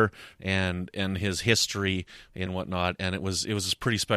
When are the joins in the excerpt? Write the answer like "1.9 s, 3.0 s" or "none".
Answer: 2.5 s